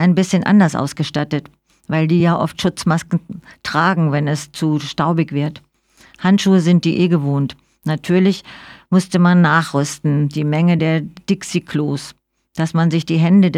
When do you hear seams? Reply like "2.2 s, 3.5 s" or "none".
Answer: none

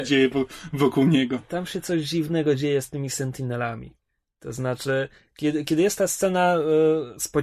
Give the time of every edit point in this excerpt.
none

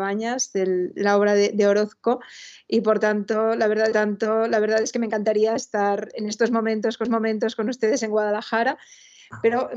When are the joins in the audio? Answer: 3.9 s, 7.0 s

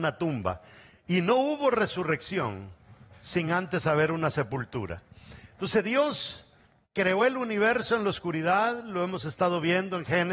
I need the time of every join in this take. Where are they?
none

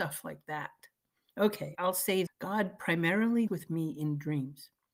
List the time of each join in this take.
1.7 s, 2.3 s, 3.5 s

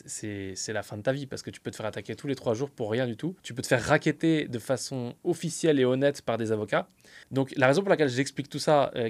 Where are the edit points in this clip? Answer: 3.4 s, 7.2 s

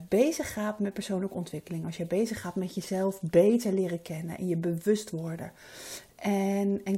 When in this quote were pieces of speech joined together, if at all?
none

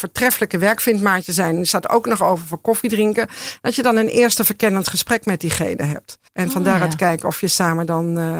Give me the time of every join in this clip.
6.3 s

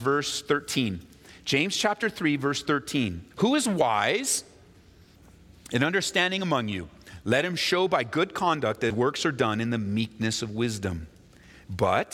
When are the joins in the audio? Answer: 3.3 s, 8.9 s

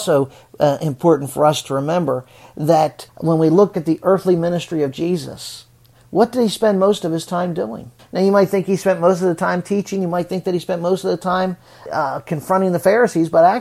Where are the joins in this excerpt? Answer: 3.1 s, 3.7 s, 8.0 s, 11.9 s

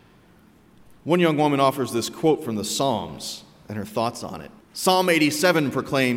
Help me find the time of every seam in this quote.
1.0 s, 4.6 s

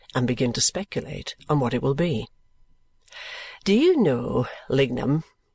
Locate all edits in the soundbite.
none

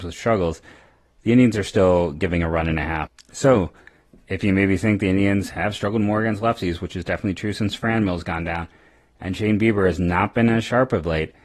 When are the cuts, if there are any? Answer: none

